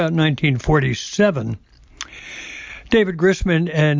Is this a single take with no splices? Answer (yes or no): yes